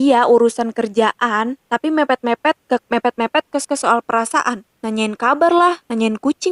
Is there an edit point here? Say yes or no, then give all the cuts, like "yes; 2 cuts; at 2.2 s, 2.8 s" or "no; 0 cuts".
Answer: yes; 4 cuts; at 1.6 s, 2.8 s, 3.6 s, 4.8 s